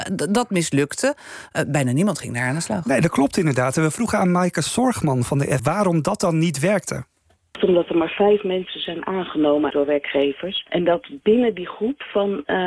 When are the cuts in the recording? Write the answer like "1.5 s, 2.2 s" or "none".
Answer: 5.6 s, 9.7 s